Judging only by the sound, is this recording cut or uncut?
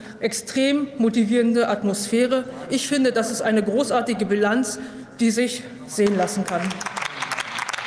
uncut